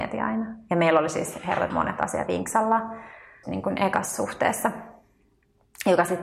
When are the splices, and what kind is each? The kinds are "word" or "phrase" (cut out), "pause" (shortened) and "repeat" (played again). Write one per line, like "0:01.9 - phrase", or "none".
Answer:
0:01.7 - word
0:02.3 - word
0:03.4 - word